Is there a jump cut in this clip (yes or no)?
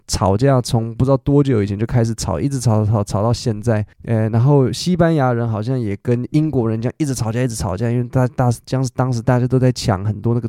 yes